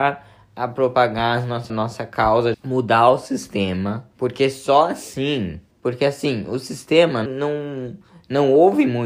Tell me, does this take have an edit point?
yes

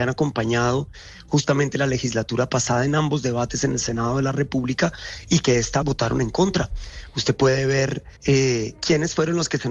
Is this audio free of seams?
no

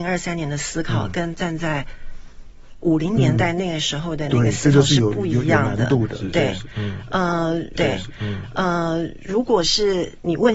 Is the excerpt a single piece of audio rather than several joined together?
no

